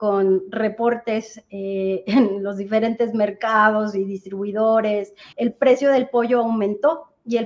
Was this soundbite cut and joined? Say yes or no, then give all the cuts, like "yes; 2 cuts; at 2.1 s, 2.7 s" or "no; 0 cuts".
yes; 1 cut; at 5.3 s